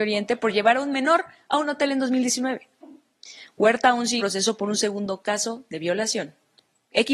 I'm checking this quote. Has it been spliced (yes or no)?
yes